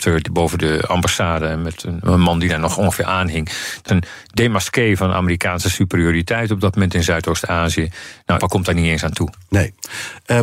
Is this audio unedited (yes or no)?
no